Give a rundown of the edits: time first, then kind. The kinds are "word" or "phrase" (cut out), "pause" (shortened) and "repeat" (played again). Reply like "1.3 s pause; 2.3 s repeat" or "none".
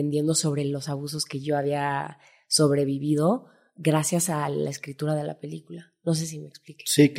none